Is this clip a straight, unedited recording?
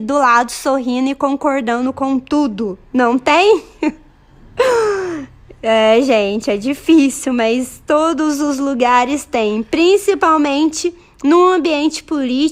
yes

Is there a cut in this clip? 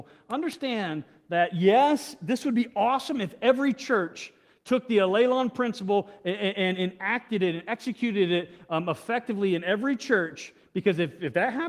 no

